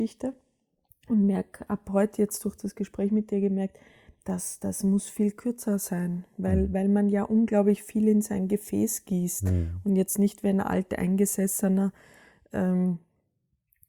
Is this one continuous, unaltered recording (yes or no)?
yes